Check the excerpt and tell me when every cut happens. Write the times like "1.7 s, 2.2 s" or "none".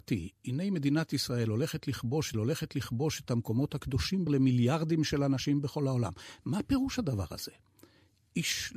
2.3 s, 4.3 s